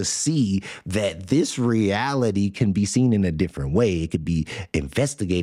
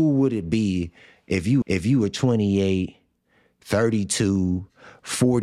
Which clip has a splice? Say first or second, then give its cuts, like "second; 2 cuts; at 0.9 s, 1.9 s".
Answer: second; 1 cut; at 1.6 s